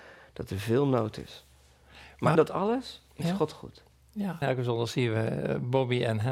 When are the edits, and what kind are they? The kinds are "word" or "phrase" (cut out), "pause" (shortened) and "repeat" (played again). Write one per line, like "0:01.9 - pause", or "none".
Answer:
0:02.4 - word
0:04.4 - word